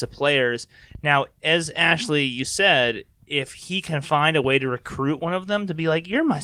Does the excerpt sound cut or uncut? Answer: cut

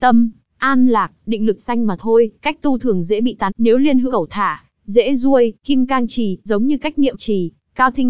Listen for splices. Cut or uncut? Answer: cut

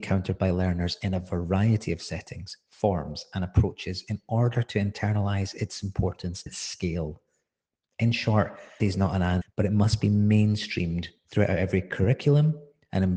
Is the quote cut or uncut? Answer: cut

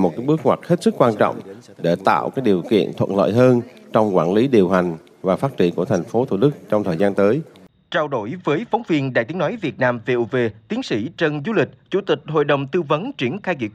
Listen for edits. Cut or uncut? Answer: uncut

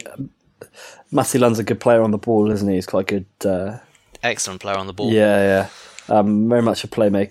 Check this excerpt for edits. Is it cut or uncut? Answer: uncut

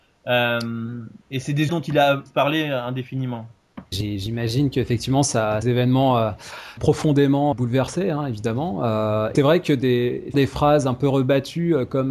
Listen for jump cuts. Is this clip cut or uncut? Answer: cut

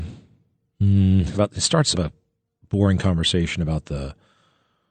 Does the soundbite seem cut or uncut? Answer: cut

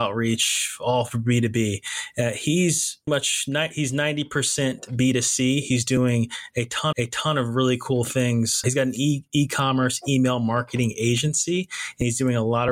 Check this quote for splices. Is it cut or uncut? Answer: cut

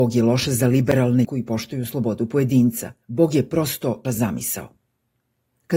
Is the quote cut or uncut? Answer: cut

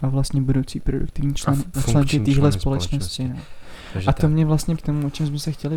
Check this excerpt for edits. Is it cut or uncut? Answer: cut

